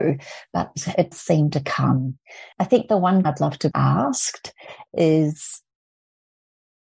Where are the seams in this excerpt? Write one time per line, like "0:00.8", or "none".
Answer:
0:01.1
0:02.5
0:03.3
0:03.7